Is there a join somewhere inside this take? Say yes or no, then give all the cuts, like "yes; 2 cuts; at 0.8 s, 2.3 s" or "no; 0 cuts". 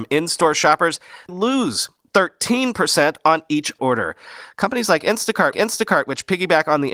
yes; 3 cuts; at 1.3 s, 3.8 s, 5.5 s